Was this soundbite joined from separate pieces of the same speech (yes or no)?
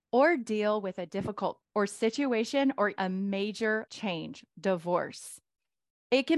yes